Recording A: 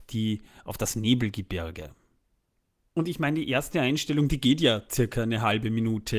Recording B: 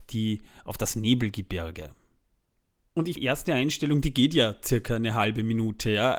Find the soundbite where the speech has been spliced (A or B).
B